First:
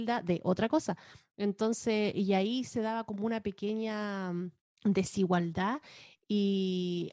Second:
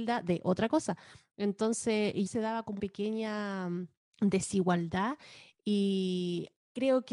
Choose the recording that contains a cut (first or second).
second